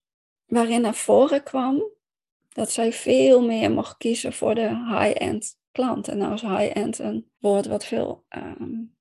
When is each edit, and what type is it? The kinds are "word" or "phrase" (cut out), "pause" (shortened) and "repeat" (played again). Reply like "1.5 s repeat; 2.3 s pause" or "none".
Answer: 7.4 s pause